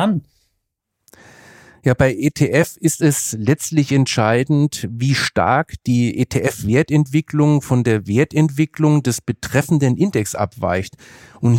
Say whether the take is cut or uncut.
uncut